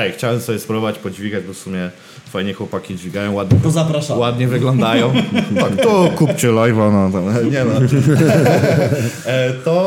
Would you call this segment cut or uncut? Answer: uncut